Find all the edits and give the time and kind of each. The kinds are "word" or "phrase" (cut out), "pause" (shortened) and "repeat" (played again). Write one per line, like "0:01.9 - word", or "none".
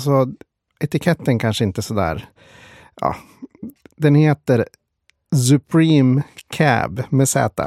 none